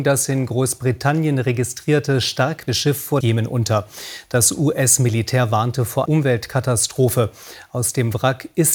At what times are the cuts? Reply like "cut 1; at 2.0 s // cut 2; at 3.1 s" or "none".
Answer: cut 1; at 2.7 s // cut 2; at 3.2 s // cut 3; at 6.1 s